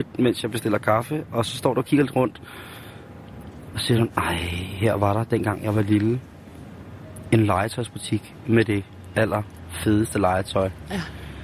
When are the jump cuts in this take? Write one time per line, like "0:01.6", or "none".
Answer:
none